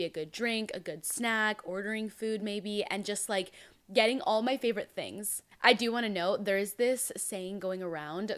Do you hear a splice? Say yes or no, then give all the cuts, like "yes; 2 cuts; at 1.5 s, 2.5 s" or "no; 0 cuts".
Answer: no; 0 cuts